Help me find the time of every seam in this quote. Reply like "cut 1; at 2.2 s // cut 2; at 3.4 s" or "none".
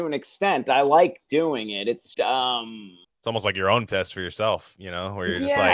cut 1; at 2.1 s // cut 2; at 3.0 s // cut 3; at 3.9 s